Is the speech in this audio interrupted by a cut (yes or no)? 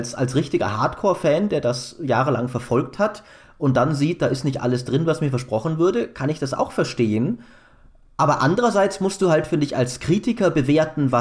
no